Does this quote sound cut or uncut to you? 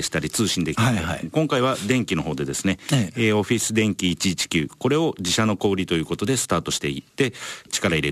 cut